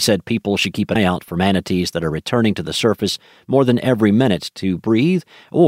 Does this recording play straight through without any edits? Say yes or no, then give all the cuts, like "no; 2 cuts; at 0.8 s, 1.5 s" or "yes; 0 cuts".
no; 1 cut; at 1.0 s